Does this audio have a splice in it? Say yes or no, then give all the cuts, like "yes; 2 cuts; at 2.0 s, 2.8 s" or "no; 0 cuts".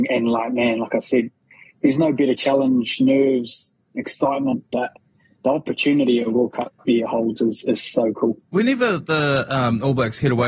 no; 0 cuts